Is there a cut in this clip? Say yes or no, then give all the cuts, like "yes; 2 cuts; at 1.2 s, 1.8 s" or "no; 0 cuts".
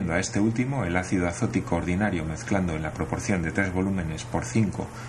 no; 0 cuts